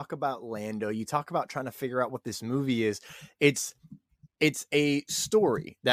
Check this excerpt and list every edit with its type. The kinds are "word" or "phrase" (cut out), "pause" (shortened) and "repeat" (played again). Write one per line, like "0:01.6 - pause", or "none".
none